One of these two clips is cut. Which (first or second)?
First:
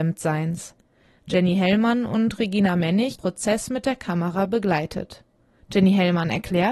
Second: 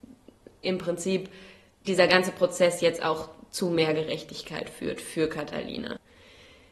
first